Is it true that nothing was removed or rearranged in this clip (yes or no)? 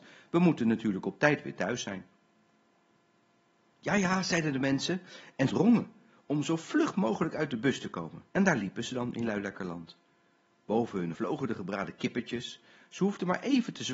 no